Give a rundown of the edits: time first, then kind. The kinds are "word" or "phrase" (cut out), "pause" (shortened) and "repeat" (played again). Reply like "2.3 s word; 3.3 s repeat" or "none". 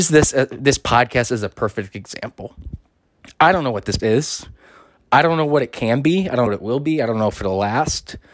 4.0 s word; 6.5 s word

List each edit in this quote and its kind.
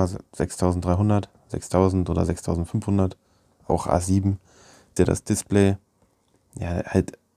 5.0 s word

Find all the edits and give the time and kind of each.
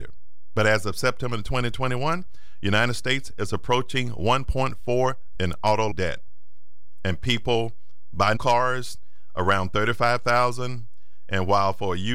5.4 s word; 5.9 s word; 8.4 s word

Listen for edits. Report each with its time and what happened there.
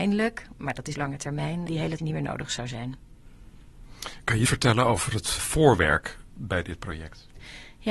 0.9 s word; 1.7 s word; 2.0 s word; 4.5 s word; 5.4 s word

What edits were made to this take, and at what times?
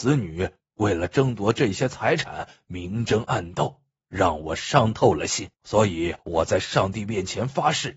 5.5 s pause; 6.2 s pause

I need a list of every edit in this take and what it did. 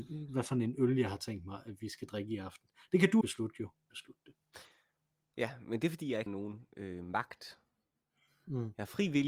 3.2 s word; 3.9 s phrase; 6.3 s word

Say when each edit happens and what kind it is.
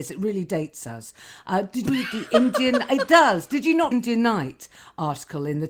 1.9 s word; 3.9 s phrase

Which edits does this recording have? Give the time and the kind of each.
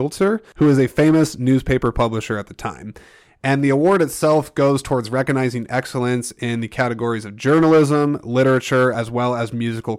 none

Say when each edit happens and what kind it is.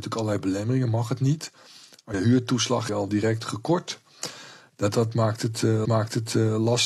2.1 s word; 2.9 s phrase; 5.8 s repeat

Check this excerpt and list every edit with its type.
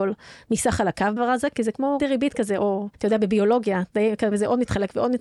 1.2 s word; 2.0 s word; 2.9 s pause; 4.3 s word

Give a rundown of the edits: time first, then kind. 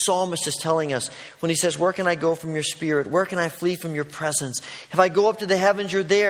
none

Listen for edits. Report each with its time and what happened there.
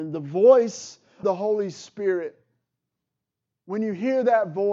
1.2 s word

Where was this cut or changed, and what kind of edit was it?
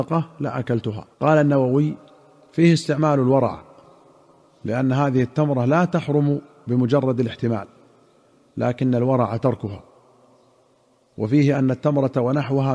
1.1 s pause

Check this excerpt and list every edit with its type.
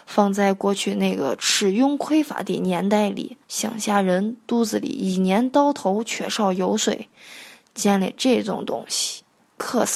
3.4 s pause

